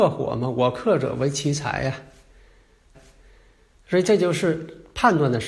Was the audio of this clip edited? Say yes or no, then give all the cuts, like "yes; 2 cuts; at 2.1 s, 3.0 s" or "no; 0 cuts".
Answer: yes; 1 cut; at 2.9 s